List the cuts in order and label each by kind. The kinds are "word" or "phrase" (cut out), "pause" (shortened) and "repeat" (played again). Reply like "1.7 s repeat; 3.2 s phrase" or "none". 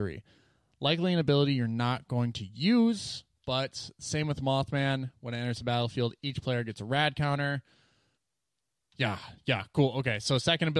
8.2 s pause